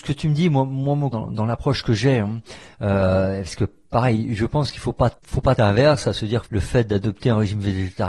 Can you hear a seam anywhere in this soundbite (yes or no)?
yes